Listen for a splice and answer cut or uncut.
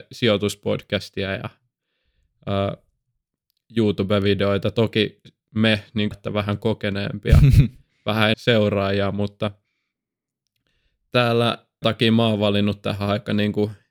cut